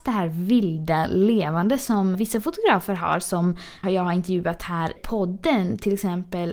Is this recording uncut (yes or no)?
no